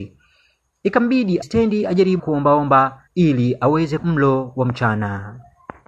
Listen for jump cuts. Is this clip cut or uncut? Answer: cut